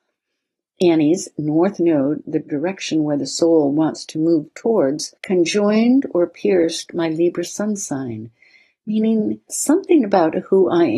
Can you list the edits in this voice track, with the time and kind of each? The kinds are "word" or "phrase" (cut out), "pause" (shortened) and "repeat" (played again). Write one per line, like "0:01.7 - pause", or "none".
0:05.2 - pause
0:09.5 - word